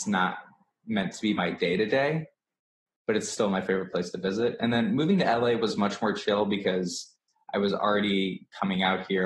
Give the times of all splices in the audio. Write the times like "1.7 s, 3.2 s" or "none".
none

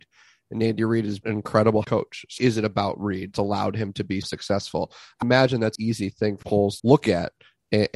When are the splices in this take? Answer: 1.2 s, 1.8 s, 2.4 s, 3.3 s, 4.2 s, 5.2 s, 5.8 s, 6.4 s, 6.8 s

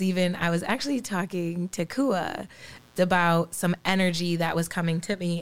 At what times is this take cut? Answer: 3.0 s

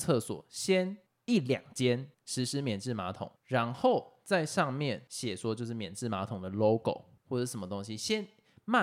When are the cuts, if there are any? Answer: 1.1 s, 2.1 s, 3.4 s, 7.2 s

